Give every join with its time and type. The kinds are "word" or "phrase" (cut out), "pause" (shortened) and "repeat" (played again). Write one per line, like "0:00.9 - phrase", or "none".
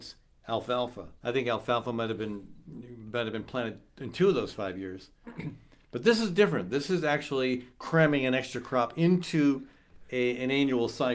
0:01.2 - pause

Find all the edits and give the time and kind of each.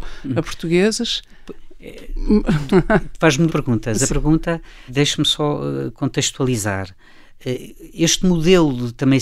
0:03.5 - word
0:04.1 - word
0:04.9 - word

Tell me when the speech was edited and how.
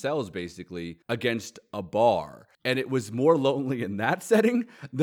0:01.0 - pause
0:02.5 - pause

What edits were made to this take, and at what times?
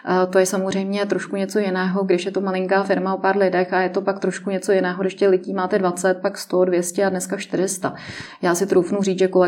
none

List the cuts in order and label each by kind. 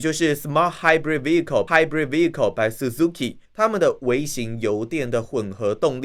0:01.7 - repeat
0:03.4 - pause

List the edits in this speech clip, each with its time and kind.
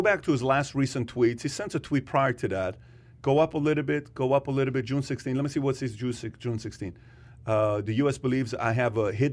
none

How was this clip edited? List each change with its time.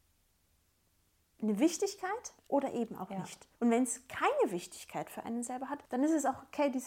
0:02.4 - pause
0:03.5 - pause
0:05.8 - pause

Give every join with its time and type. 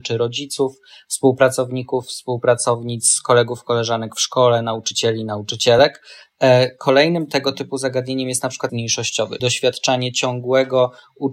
0:08.7 - word
0:09.4 - word

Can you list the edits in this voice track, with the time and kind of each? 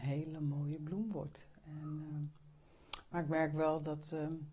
none

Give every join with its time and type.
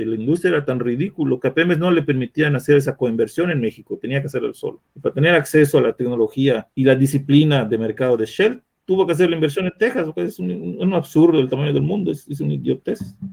0:04.9 - pause
0:06.7 - pause

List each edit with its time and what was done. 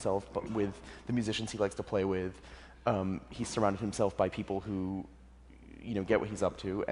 none

